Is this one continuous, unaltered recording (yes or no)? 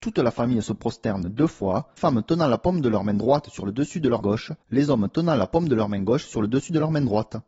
no